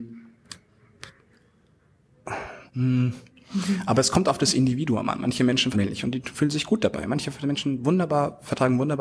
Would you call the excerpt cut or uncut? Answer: cut